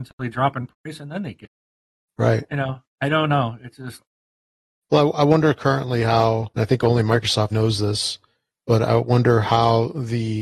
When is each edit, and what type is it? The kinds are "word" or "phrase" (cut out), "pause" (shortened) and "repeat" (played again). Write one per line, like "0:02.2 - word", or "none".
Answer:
0:06.5 - pause
0:07.5 - word

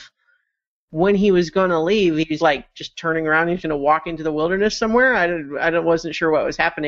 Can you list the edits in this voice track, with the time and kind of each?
0:02.4 - word
0:03.6 - word

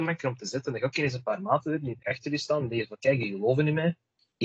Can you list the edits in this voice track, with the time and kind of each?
none

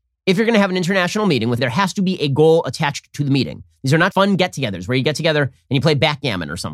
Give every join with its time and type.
0:01.6 - phrase
0:04.1 - word

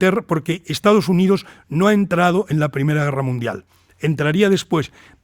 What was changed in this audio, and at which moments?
none

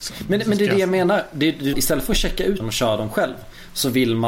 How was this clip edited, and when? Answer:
0:01.7 - phrase
0:02.6 - word

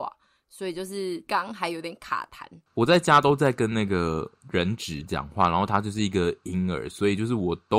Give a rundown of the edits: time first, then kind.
0:02.6 - pause

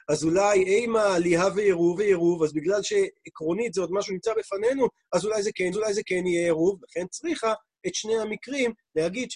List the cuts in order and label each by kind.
0:02.0 - repeat
0:04.1 - phrase
0:05.7 - repeat

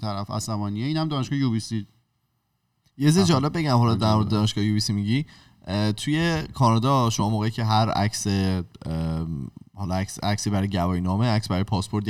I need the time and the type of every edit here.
none

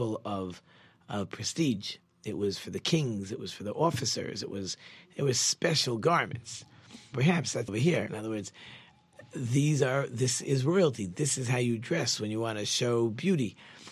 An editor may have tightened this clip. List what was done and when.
0:07.1 - word
0:07.7 - phrase
0:08.1 - word

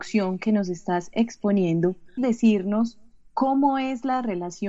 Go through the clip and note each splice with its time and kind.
0:02.2 - word

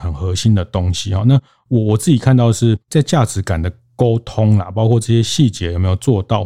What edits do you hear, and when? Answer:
0:02.8 - pause

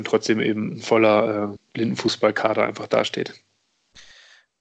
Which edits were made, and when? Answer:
0:01.6 - word

